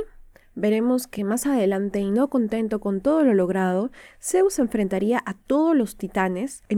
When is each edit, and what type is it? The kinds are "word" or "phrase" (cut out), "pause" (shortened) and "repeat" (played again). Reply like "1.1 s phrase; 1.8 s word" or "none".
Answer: none